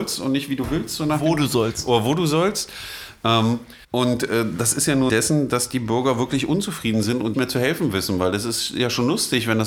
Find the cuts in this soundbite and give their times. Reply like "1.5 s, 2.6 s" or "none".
3.8 s, 5.1 s, 7.3 s

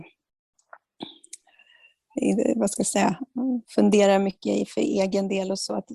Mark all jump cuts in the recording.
3.6 s

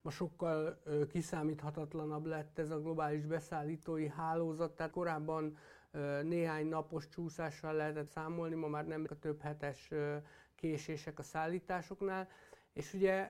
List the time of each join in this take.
4.9 s, 8.1 s, 9.1 s

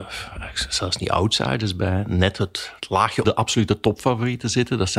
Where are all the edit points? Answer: 3.2 s

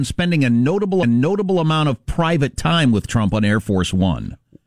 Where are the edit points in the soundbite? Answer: 1.0 s

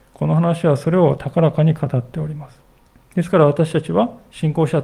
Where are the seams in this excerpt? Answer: 2.8 s

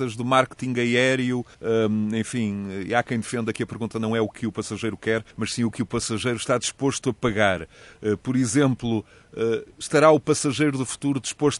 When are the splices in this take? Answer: 1.5 s, 3.9 s, 5.3 s, 9.7 s

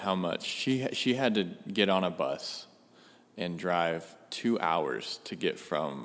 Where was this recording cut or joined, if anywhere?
none

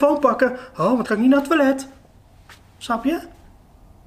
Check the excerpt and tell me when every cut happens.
1.1 s

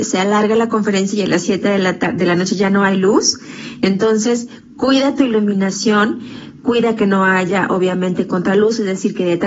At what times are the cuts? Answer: none

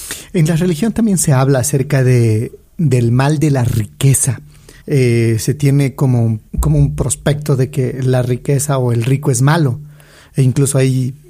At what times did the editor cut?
4.8 s, 6.5 s

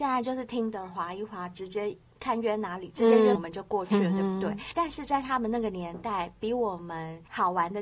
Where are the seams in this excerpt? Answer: 3.3 s

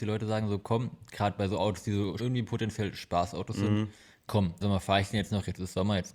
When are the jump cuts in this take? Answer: 2.2 s, 4.6 s

